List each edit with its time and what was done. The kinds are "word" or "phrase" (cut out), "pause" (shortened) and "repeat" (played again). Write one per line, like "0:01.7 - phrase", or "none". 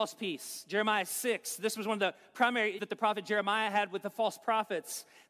0:02.8 - word